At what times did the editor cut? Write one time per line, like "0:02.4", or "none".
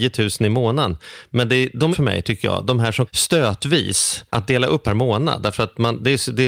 0:01.9
0:03.1
0:04.3
0:04.8